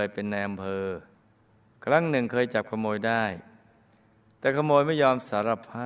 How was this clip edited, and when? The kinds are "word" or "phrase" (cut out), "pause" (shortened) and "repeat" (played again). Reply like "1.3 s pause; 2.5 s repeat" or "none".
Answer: none